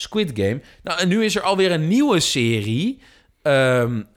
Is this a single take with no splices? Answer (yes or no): yes